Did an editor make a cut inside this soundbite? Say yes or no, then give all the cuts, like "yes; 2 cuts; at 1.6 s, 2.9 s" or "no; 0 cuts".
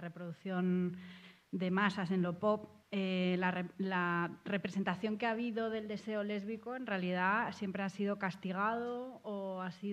no; 0 cuts